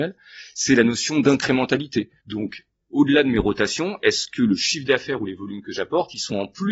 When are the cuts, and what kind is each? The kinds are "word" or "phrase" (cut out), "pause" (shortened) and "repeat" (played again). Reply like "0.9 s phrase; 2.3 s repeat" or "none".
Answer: 2.2 s pause